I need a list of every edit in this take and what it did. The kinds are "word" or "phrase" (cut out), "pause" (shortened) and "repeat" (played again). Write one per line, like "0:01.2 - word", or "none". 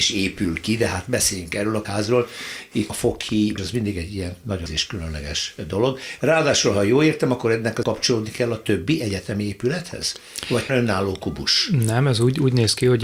0:01.8 - word
0:02.9 - word
0:03.6 - word
0:04.7 - word
0:07.8 - word
0:10.7 - word